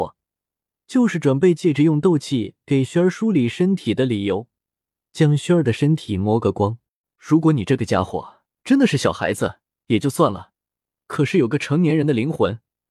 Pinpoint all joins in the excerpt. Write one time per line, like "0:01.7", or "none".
0:07.0
0:08.5